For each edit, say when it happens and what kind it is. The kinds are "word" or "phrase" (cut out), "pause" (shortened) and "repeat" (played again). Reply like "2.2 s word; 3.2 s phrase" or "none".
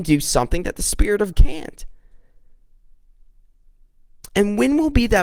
1.3 s word